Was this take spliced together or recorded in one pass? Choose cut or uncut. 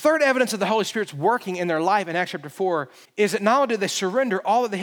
cut